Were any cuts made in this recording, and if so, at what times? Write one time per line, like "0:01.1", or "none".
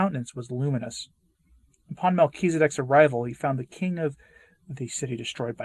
none